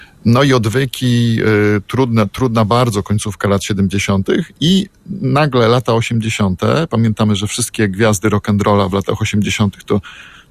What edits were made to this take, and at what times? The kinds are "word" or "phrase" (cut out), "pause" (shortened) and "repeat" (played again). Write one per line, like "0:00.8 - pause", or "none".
none